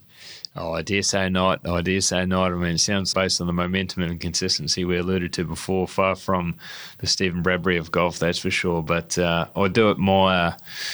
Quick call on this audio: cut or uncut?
cut